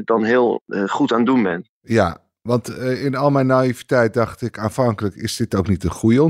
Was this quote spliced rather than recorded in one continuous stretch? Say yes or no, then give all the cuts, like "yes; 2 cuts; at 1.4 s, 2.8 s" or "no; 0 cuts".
no; 0 cuts